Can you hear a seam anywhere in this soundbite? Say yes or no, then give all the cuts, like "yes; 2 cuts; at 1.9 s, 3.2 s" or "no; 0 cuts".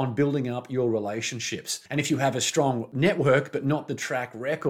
yes; 1 cut; at 1.9 s